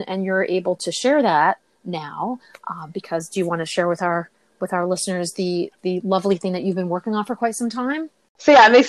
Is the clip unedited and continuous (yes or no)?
yes